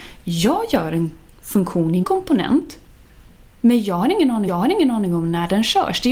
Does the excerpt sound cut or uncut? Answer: cut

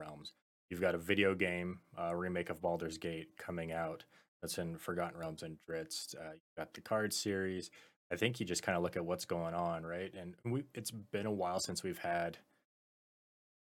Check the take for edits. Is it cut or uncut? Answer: uncut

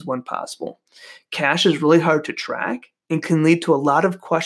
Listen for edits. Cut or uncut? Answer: uncut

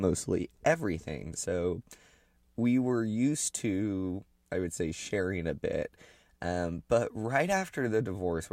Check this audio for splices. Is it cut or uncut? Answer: uncut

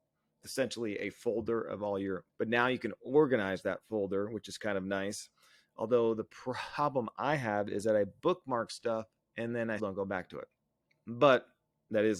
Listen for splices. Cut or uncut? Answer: cut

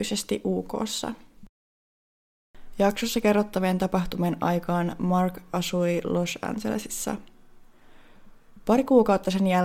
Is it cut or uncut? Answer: uncut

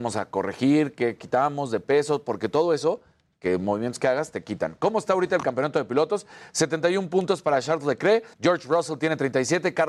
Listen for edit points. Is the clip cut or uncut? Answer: cut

